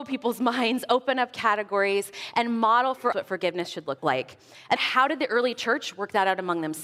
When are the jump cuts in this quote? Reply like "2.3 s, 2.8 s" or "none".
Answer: 3.1 s, 4.0 s, 4.8 s